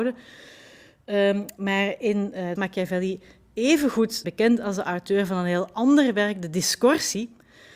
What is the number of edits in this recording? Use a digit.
2